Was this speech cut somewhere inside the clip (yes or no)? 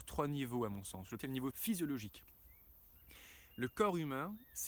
yes